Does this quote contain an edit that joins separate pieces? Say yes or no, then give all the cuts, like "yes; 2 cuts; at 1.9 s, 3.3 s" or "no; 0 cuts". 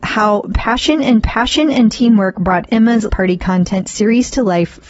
yes; 2 cuts; at 1.2 s, 3.1 s